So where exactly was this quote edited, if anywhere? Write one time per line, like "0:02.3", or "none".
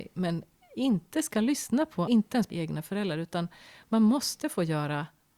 0:02.1
0:02.5